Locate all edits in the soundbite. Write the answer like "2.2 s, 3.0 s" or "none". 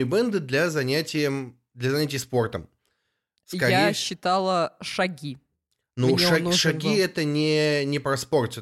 none

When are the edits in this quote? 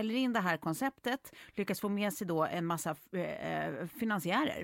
none

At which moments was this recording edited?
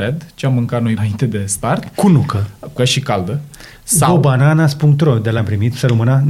1.0 s, 2.8 s, 5.4 s

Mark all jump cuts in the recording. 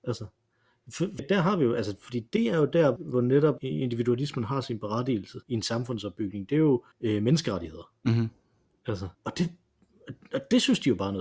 1.2 s, 3.0 s, 3.6 s, 5.4 s, 6.9 s, 9.1 s

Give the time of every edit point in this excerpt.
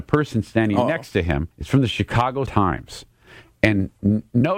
1.5 s, 2.5 s

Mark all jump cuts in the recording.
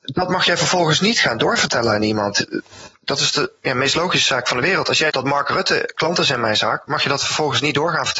5.1 s

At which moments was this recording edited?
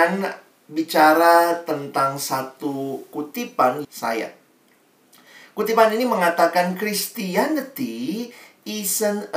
3.8 s

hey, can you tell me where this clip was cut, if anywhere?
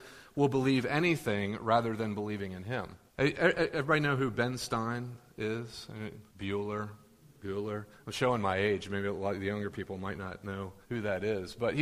3.1 s, 6.3 s, 10.8 s

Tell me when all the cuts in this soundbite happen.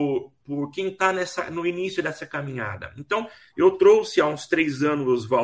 none

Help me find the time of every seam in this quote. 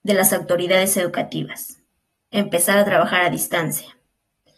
none

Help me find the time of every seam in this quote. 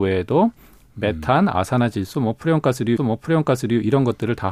3.0 s

